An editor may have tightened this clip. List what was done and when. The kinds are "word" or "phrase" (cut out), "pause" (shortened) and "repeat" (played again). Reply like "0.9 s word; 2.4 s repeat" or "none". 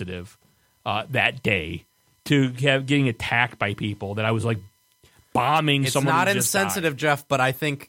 none